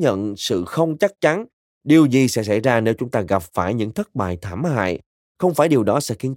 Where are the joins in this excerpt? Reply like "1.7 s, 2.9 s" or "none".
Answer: none